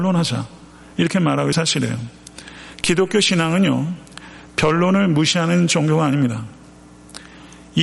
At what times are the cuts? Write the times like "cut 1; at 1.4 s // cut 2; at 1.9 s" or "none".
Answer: cut 1; at 1.5 s